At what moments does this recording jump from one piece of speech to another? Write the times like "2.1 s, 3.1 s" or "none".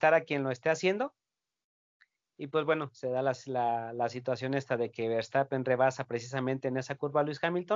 none

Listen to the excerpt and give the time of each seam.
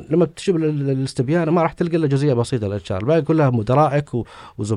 none

